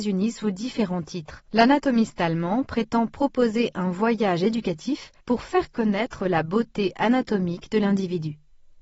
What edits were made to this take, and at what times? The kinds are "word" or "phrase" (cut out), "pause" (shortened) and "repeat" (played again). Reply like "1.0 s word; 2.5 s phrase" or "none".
1.5 s pause; 5.2 s pause